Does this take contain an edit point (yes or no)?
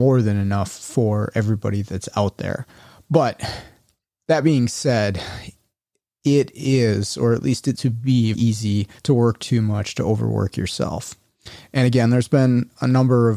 yes